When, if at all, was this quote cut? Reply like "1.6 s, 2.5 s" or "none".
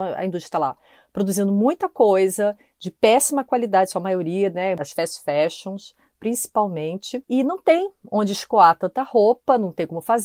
none